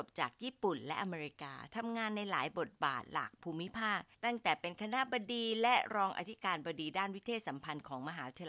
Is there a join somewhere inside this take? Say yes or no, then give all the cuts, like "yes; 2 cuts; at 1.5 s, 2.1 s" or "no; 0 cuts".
yes; 1 cut; at 4.1 s